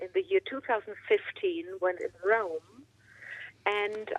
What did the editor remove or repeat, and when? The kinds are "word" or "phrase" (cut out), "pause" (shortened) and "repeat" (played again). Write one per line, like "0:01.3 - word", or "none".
0:02.0 - phrase